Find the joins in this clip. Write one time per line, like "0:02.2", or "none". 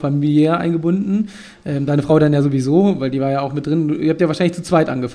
none

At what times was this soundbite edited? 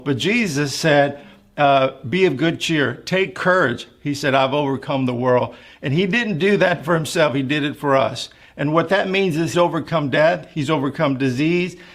0:09.5

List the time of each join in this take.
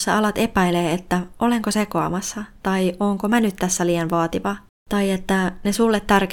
0:04.7

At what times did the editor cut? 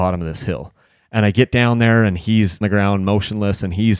0:02.6

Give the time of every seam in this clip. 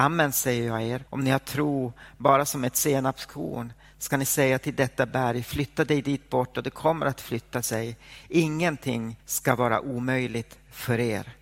0:01.1
0:09.2

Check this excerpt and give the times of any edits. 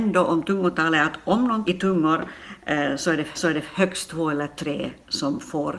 0:01.7
0:03.3

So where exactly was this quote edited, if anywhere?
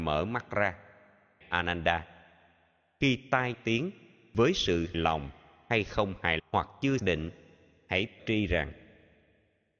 0:01.4
0:03.5
0:04.9
0:06.4
0:07.0
0:08.2

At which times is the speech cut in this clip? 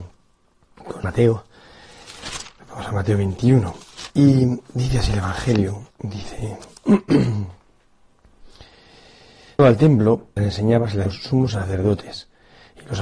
0:01.0
0:04.1
0:05.9
0:09.6
0:10.4
0:11.1

